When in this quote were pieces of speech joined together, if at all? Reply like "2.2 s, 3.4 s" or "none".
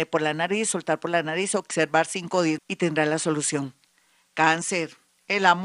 2.6 s